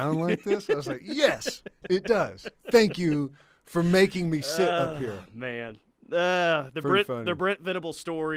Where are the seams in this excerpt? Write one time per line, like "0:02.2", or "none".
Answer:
none